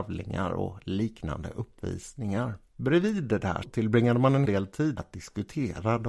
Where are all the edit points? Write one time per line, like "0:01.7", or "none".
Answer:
0:02.7
0:03.6
0:04.5
0:05.0